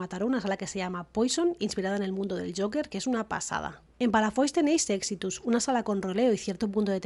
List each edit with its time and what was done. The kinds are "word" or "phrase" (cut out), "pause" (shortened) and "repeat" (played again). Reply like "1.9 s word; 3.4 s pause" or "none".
3.9 s pause